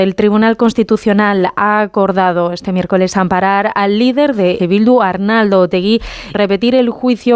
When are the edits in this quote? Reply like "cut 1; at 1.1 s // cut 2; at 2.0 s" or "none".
cut 1; at 4.6 s // cut 2; at 6.3 s